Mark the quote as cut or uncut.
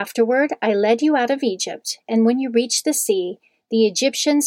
uncut